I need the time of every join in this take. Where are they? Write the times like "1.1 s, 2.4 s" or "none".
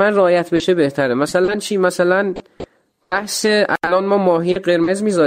none